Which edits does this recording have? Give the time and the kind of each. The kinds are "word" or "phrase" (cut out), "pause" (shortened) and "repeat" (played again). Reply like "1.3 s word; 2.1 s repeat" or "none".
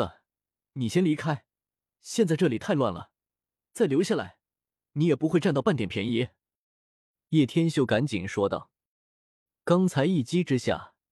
none